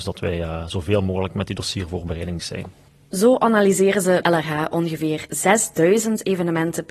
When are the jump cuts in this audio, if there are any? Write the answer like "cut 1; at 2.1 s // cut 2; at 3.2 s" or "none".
cut 1; at 2.4 s // cut 2; at 4.2 s